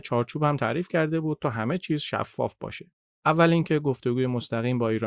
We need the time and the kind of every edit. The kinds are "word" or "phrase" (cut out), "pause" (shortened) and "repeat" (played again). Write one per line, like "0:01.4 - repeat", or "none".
none